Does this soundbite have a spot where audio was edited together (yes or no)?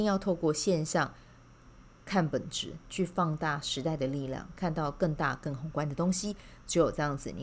no